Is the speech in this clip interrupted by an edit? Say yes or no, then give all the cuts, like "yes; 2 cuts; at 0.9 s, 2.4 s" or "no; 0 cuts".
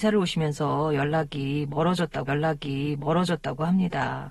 yes; 1 cut; at 2.3 s